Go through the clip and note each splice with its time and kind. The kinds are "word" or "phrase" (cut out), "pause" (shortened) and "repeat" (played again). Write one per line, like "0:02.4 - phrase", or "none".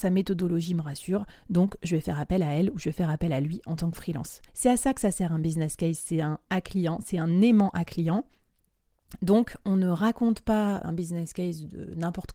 0:04.5 - pause
0:06.5 - word
0:10.8 - word